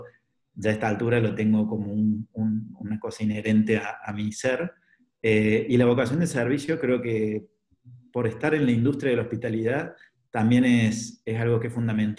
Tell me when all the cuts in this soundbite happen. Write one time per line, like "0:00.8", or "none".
none